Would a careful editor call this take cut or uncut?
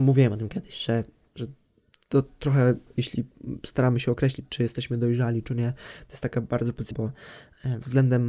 cut